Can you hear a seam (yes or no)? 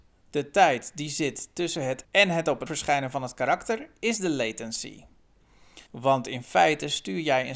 yes